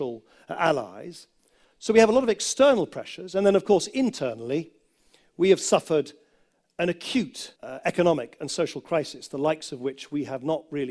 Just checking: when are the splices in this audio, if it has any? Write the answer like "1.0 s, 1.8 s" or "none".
7.6 s